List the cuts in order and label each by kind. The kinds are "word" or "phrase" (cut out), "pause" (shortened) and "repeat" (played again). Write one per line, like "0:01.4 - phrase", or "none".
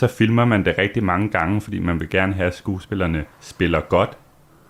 0:03.3 - pause